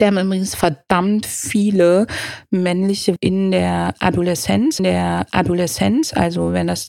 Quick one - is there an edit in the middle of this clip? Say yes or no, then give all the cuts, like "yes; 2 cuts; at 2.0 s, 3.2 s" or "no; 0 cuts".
yes; 2 cuts; at 3.2 s, 4.8 s